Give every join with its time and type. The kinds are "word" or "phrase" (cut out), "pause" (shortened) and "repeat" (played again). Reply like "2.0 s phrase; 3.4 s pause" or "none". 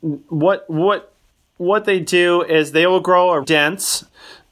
3.4 s word